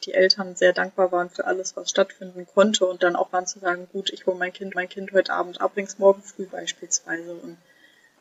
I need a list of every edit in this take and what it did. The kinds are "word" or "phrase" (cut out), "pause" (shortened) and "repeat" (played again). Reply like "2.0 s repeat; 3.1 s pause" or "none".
3.3 s word; 4.7 s repeat; 5.7 s word; 6.5 s word